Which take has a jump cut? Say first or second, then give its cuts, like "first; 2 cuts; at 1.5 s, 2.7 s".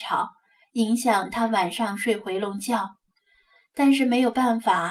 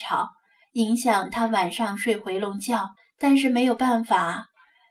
second; 1 cut; at 3.0 s